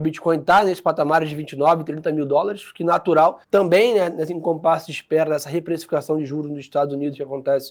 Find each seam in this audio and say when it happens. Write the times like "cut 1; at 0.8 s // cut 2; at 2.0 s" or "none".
cut 1; at 3.4 s